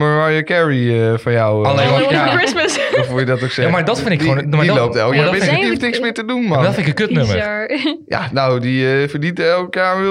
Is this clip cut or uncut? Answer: uncut